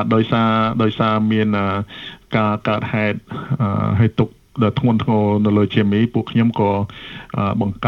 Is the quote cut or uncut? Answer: uncut